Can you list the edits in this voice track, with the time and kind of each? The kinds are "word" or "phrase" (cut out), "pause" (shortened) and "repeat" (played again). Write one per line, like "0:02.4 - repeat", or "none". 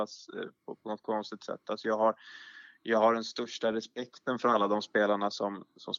none